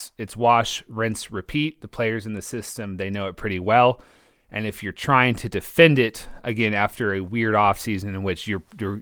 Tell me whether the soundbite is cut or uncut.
uncut